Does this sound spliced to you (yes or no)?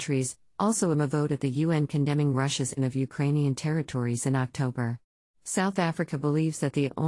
yes